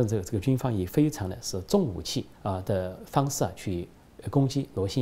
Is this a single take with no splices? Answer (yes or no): no